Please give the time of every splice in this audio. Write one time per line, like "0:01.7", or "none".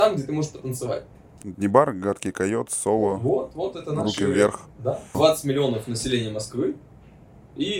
0:01.1